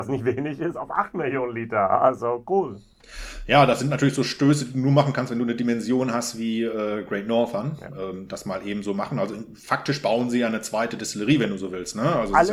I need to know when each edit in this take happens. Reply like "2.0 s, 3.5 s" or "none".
none